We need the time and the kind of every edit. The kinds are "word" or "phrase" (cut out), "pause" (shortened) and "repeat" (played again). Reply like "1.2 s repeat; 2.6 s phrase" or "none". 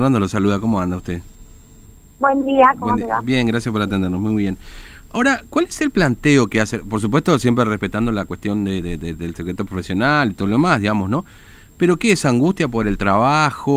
none